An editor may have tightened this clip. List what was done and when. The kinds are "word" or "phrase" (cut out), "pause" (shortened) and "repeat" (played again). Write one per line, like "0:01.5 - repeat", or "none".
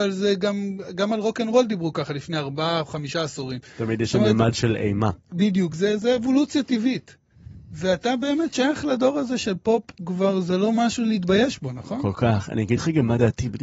none